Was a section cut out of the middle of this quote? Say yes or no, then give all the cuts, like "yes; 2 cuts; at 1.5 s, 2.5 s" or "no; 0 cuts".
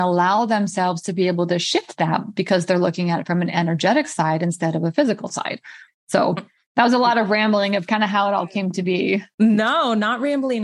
no; 0 cuts